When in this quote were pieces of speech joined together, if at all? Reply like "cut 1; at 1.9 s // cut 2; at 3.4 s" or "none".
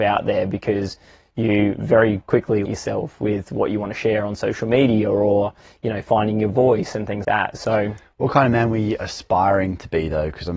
cut 1; at 2.6 s // cut 2; at 7.2 s